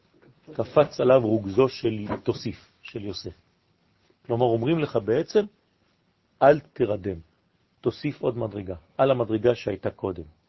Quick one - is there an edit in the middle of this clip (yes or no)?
no